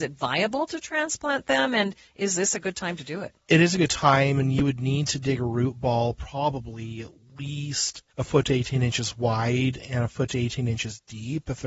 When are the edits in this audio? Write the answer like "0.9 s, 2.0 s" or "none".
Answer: 8.1 s